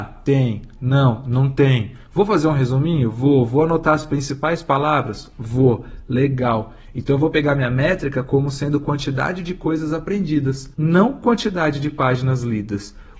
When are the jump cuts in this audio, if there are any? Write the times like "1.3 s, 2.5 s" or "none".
10.7 s